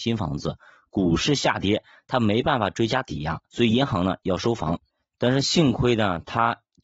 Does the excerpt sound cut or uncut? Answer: uncut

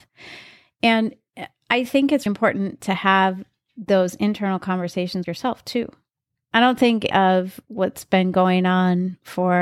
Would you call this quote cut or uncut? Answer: cut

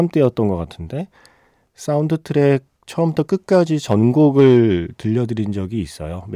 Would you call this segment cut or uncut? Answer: uncut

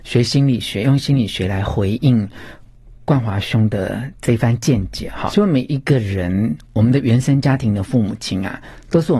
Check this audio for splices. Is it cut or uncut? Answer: cut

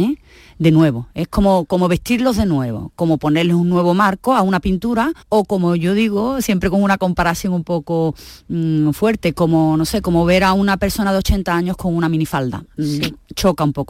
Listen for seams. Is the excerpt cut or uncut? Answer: cut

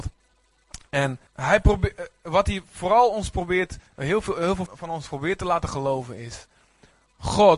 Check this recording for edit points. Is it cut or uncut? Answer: cut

